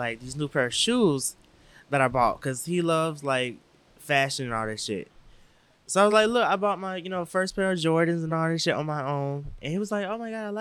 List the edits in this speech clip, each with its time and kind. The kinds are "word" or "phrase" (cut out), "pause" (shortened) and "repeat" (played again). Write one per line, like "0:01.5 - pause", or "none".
none